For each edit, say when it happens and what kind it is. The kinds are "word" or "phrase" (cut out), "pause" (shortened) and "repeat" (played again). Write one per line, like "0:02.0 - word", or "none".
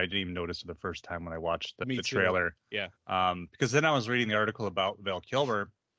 0:01.8 - word
0:03.0 - pause